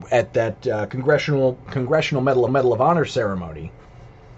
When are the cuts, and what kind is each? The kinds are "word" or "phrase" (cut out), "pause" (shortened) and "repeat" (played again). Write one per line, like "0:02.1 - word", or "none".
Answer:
0:01.6 - word
0:02.5 - repeat